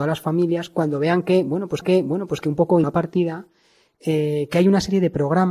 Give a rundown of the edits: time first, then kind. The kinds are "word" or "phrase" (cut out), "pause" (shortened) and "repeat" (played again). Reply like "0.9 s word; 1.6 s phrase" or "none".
1.8 s repeat; 2.8 s phrase